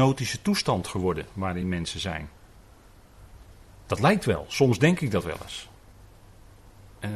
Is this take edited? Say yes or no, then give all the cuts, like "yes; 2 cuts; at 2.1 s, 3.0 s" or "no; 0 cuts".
no; 0 cuts